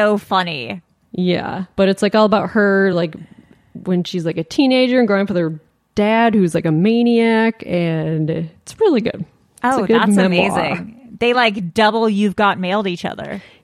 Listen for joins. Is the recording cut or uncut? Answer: uncut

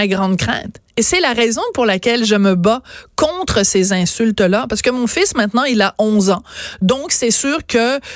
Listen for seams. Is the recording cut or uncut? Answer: uncut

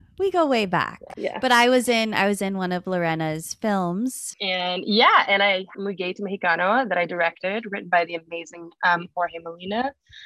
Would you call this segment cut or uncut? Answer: cut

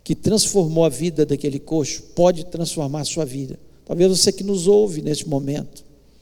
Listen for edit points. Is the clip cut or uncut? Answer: uncut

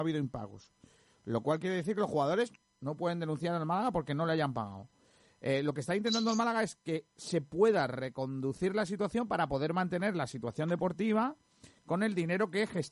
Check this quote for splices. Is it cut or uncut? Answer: uncut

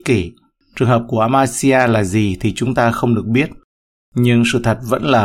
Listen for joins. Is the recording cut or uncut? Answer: uncut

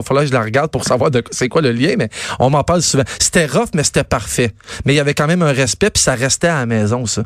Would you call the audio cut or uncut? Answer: uncut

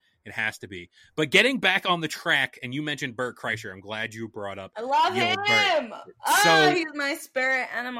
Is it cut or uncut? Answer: uncut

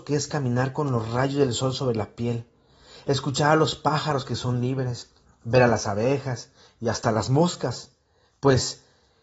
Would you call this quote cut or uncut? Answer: uncut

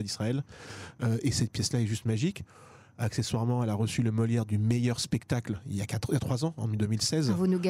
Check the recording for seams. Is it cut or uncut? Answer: uncut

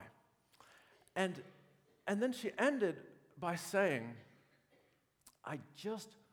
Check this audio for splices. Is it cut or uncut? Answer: uncut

